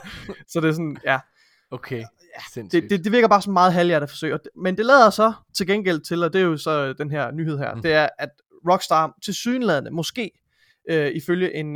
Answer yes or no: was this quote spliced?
no